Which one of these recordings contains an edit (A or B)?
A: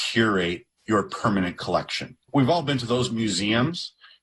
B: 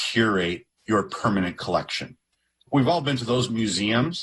A